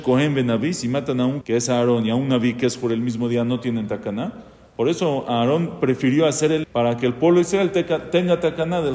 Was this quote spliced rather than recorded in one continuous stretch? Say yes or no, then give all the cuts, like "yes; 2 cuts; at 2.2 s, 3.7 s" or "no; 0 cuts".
yes; 2 cuts; at 1.4 s, 6.6 s